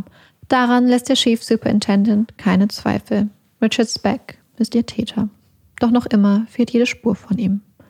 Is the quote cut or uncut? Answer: uncut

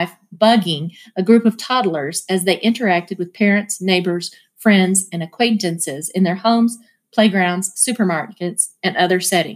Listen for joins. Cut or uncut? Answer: uncut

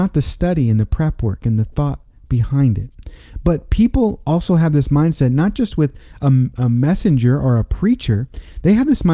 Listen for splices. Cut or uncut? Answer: uncut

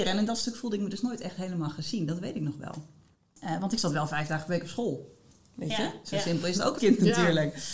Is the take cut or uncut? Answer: cut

